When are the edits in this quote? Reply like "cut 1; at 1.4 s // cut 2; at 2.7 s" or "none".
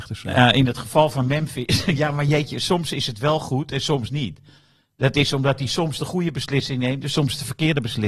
none